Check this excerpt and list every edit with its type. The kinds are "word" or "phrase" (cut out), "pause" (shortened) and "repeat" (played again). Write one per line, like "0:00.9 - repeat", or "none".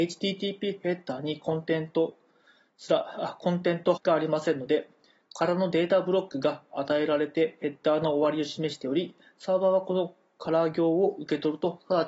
0:04.0 - word